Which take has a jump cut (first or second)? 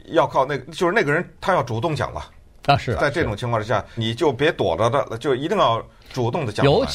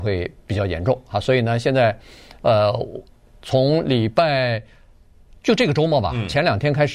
first